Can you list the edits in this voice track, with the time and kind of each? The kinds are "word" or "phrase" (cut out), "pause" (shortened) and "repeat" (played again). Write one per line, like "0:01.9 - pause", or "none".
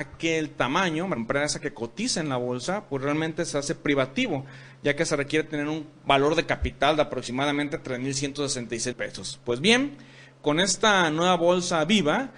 0:01.2 - phrase
0:08.9 - phrase